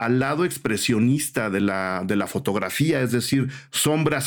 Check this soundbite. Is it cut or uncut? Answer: uncut